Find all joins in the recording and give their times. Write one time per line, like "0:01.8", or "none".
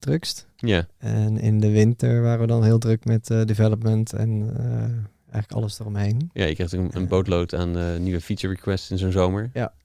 none